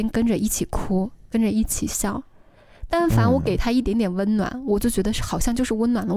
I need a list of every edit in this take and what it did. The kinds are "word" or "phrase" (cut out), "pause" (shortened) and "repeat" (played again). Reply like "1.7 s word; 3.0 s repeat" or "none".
none